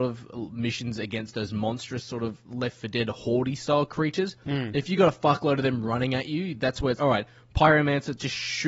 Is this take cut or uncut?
cut